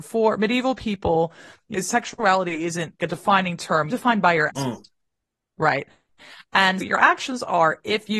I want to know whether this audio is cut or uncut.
cut